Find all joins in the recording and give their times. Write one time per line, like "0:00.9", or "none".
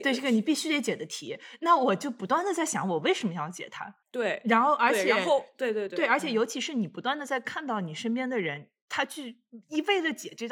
0:04.0